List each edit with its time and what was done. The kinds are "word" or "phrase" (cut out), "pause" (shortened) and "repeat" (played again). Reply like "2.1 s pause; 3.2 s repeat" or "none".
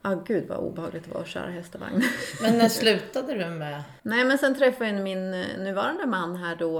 4.0 s pause